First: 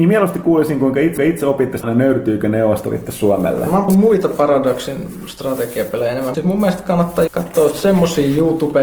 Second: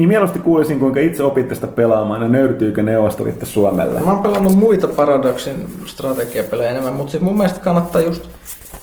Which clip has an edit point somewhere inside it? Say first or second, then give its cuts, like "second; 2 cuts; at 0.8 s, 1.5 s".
first; 5 cuts; at 1.2 s, 1.8 s, 3.9 s, 6.3 s, 7.3 s